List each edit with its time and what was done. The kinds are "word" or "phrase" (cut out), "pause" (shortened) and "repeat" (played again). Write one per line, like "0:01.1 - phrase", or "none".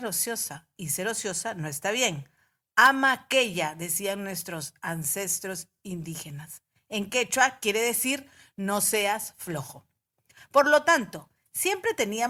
none

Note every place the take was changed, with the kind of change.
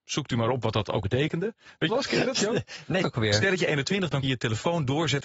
0:01.0 - word
0:01.9 - phrase
0:03.0 - phrase
0:04.2 - word

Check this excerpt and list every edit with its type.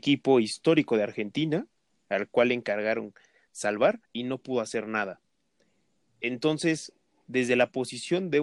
0:01.9 - pause
0:04.0 - pause

